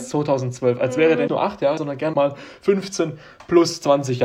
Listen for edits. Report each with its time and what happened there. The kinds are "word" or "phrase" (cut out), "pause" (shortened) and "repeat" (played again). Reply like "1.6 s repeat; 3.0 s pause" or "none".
1.3 s word; 1.8 s word; 2.1 s word